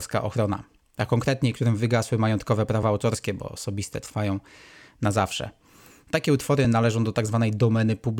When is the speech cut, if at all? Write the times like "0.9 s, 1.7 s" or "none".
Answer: none